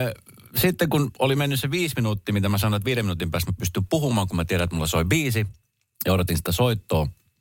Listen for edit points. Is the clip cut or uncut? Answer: uncut